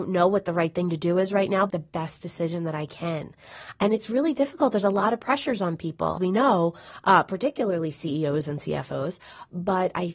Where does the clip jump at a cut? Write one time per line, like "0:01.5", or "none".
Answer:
0:01.7
0:06.2